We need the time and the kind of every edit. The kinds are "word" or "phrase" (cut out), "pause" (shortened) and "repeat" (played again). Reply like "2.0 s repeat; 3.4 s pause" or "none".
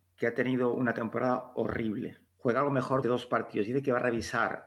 2.3 s pause; 3.0 s word